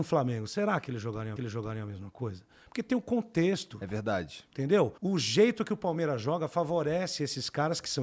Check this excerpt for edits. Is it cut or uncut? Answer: cut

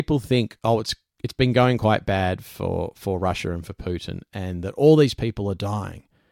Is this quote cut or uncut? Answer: uncut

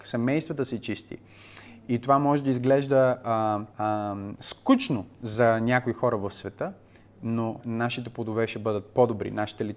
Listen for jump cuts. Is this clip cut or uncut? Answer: cut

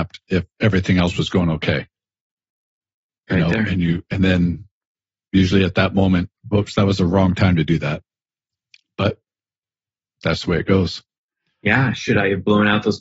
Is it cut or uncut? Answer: uncut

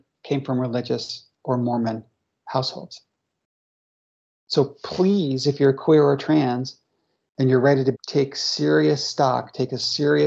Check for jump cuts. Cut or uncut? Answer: cut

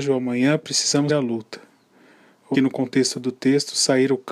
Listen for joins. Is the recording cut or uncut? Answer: cut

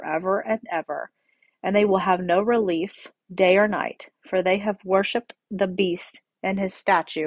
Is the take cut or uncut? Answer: uncut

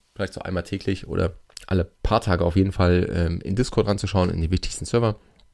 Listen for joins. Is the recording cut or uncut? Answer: uncut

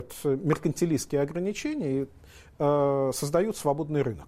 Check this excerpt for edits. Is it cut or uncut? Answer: uncut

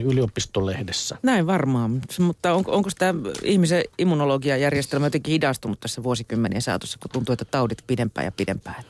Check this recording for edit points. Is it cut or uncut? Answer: cut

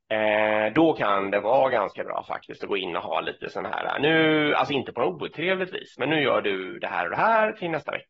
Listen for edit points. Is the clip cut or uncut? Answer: uncut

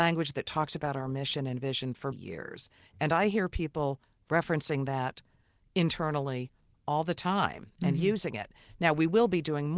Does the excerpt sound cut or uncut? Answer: cut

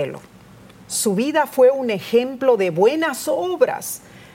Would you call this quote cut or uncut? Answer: uncut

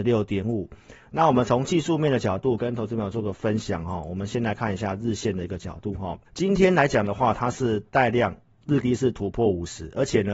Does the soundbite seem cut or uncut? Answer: cut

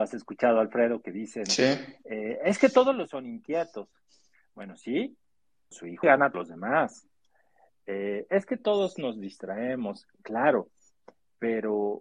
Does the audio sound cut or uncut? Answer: cut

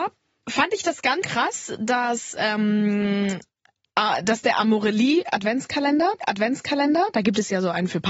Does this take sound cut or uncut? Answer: cut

